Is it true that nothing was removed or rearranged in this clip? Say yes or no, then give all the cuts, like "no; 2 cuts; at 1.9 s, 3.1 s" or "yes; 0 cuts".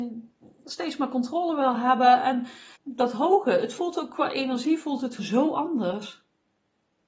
no; 2 cuts; at 2.8 s, 5.2 s